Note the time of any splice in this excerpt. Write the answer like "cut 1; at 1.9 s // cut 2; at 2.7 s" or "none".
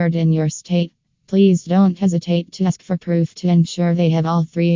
none